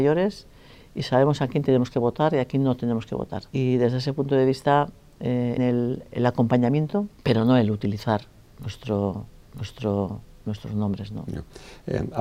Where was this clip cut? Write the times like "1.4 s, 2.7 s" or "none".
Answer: 3.5 s, 5.6 s, 7.2 s, 9.4 s